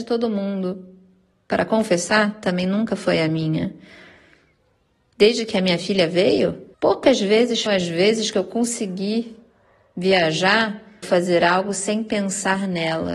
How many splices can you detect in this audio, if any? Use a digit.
3